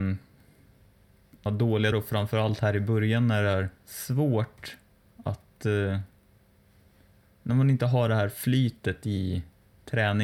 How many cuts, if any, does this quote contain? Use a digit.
3